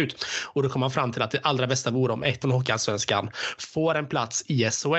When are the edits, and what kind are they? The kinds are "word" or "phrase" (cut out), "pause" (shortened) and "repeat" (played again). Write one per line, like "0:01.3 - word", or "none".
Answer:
0:02.4 - word